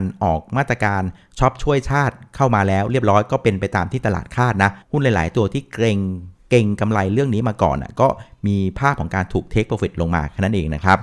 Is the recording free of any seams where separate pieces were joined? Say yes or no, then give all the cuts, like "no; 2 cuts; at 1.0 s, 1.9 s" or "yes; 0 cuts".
no; 1 cut; at 4.8 s